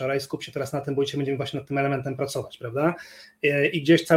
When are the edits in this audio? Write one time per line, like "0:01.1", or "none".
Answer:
none

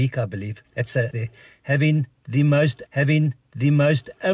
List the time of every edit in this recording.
0:01.1
0:02.9

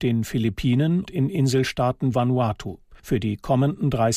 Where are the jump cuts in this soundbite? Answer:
0:01.1
0:02.1
0:03.0

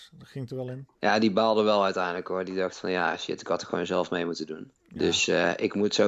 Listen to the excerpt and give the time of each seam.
0:00.9
0:04.8

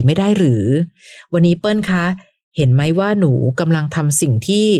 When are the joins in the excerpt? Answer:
none

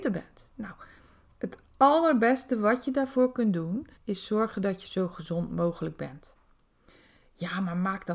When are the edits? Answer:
0:04.0

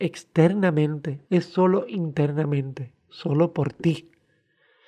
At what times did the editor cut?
0:01.2

